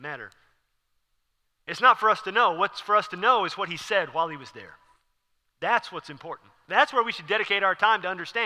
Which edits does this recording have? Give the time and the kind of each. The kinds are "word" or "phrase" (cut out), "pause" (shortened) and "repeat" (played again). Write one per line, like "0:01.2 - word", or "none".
none

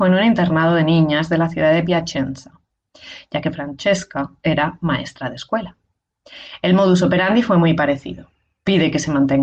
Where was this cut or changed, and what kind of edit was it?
none

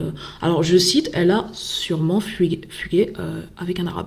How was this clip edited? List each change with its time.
none

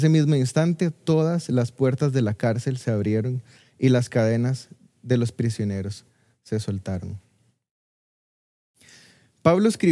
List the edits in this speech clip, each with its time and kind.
none

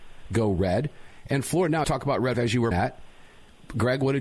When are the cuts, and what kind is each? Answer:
0:01.8 - word
0:02.3 - word
0:02.7 - word

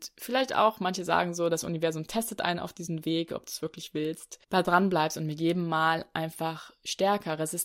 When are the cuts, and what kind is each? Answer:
0:04.4 - pause

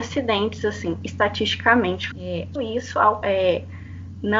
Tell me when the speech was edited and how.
0:02.1 - word
0:02.6 - word
0:03.2 - phrase

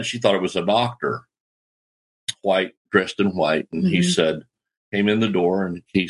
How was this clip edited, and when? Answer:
none

